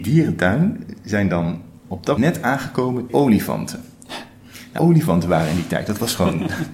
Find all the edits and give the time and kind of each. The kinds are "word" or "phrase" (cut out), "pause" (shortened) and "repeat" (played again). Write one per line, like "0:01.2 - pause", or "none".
0:02.2 - word
0:03.1 - word
0:04.8 - word